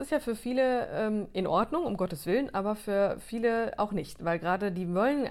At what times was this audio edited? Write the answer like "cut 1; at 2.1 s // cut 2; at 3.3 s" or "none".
none

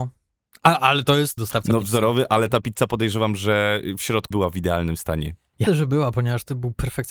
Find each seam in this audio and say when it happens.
cut 1; at 1.4 s // cut 2; at 4.3 s // cut 3; at 5.7 s

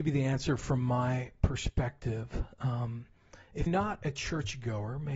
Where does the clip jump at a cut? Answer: cut 1; at 3.7 s

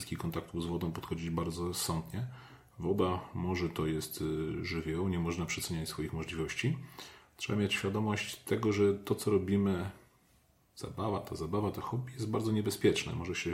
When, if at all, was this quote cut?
none

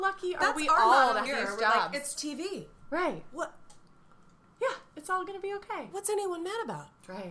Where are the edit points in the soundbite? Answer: cut 1; at 1.3 s // cut 2; at 2.2 s

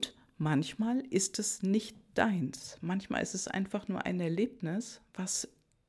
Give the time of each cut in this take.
none

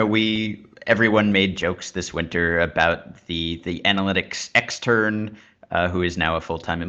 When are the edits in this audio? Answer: none

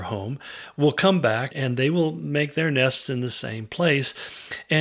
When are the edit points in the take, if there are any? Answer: cut 1; at 1.5 s

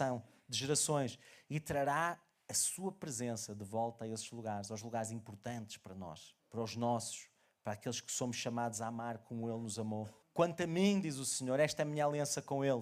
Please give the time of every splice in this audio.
cut 1; at 6.4 s // cut 2; at 10.2 s

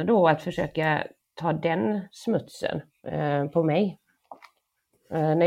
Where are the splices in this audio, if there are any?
none

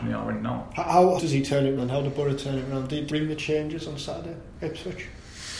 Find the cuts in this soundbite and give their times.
cut 1; at 1.2 s // cut 2; at 1.8 s // cut 3; at 3.1 s

